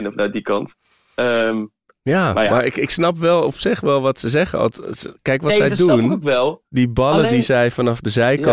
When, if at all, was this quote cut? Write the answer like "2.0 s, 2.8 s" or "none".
none